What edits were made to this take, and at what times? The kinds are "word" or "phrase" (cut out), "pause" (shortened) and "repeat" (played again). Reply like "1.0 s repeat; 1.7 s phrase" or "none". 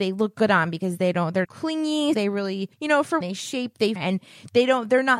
1.4 s phrase; 2.1 s word; 2.7 s pause; 3.2 s word; 4.0 s word